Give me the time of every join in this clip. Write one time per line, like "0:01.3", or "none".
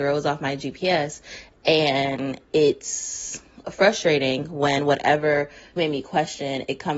0:03.6
0:05.8